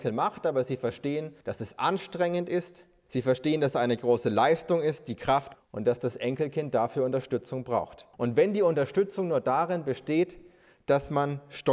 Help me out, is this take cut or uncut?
cut